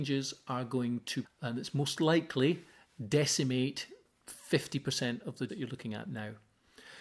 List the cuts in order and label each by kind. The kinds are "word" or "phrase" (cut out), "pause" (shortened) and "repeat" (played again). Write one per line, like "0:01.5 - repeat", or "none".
0:01.2 - word
0:05.5 - word